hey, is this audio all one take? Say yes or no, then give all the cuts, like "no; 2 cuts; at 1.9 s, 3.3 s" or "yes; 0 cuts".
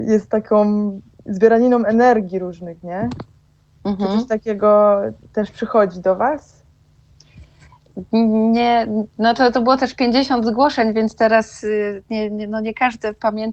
yes; 0 cuts